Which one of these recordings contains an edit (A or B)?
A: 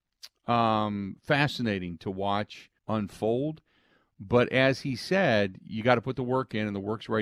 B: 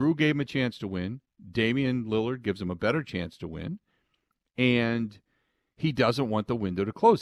A